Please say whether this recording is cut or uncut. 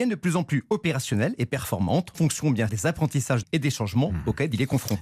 cut